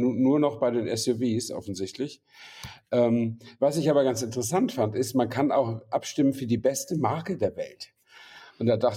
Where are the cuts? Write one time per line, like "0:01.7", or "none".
none